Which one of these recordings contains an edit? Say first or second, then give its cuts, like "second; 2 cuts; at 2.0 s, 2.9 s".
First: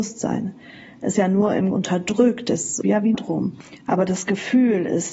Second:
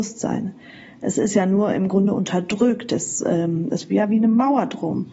first; 4 cuts; at 1.2 s, 1.7 s, 2.8 s, 3.1 s